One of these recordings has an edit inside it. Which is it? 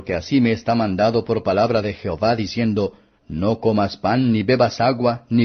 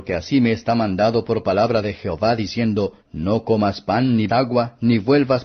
second; 2 cuts; at 3.0 s, 4.3 s

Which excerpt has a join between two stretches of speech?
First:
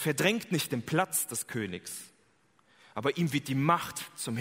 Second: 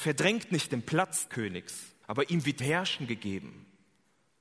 second; 3 cuts; at 1.3 s, 2.0 s, 2.6 s

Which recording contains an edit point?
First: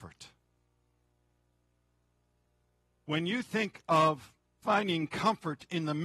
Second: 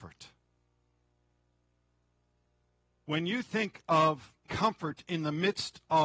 second; 1 cut; at 4.5 s

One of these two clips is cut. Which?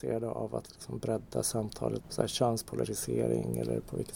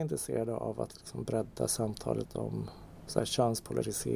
first; 1 cut; at 2.0 s

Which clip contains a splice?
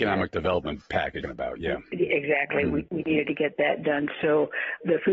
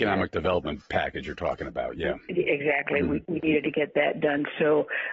first; 1 cut; at 1.2 s

